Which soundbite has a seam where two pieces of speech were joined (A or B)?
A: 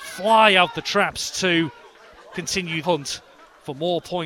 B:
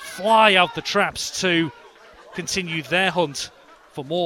A